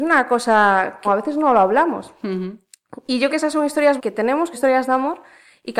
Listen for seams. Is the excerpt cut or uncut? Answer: cut